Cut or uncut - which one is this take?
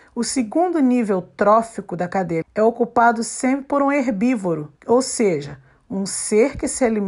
cut